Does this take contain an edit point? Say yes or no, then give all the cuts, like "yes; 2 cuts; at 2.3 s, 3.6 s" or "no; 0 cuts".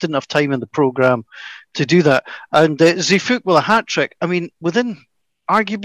yes; 1 cut; at 4.5 s